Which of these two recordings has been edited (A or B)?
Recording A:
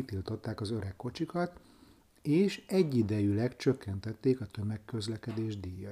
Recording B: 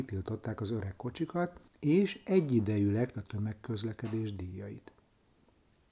B